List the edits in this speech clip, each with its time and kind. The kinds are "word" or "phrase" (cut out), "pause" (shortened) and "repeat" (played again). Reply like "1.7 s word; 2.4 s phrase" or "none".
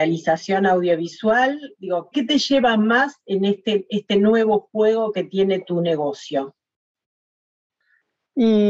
2.1 s word